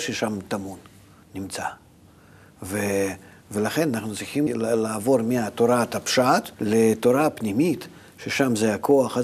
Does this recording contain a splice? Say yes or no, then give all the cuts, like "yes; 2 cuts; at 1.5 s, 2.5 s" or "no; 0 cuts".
yes; 2 cuts; at 4.5 s, 6.5 s